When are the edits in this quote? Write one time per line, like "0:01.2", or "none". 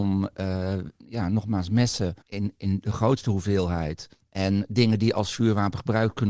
0:02.2
0:04.1